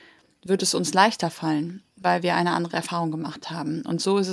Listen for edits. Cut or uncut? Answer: uncut